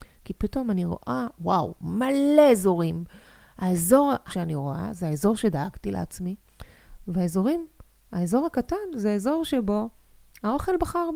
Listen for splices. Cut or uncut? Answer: cut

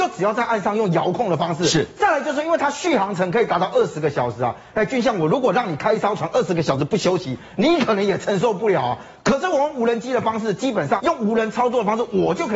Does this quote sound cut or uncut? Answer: cut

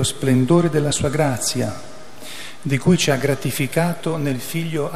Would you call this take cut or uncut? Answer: uncut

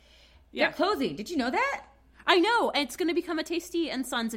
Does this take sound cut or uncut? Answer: uncut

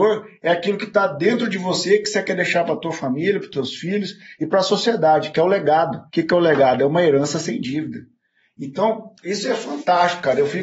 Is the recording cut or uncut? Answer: cut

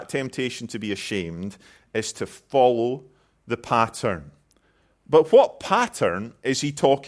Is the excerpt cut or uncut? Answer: uncut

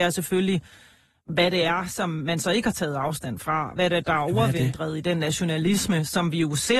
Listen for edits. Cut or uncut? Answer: uncut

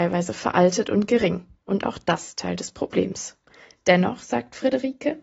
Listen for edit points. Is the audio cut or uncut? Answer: uncut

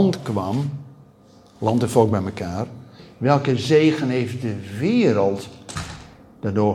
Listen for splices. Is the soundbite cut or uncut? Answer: uncut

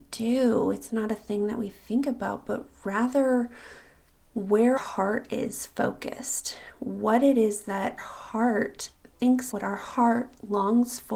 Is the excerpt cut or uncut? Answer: cut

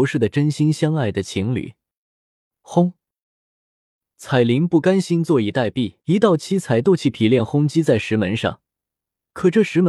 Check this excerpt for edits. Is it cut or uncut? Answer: cut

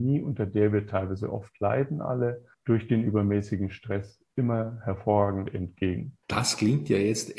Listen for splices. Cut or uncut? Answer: cut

